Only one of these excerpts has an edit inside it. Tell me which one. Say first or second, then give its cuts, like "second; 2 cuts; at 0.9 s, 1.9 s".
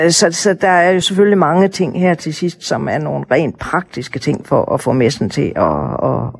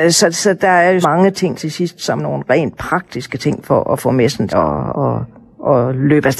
second; 5 cuts; at 1.0 s, 1.5 s, 2.2 s, 4.5 s, 4.9 s